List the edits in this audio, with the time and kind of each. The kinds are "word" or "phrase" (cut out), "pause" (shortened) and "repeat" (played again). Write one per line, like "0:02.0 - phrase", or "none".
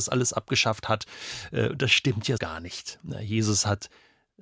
0:02.4 - word